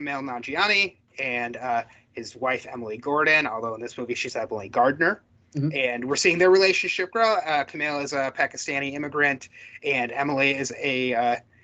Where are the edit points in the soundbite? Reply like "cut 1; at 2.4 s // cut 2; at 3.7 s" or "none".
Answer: none